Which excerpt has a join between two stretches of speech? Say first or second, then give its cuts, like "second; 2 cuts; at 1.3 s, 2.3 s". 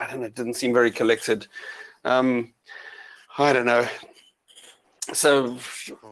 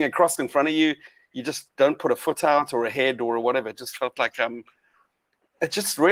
first; 1 cut; at 3.2 s